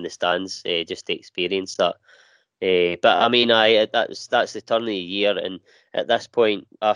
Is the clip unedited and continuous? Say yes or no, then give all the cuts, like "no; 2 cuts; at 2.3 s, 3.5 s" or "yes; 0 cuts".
yes; 0 cuts